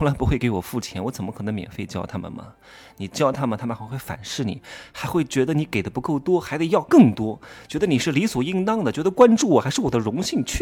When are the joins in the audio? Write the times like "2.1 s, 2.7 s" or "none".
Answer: none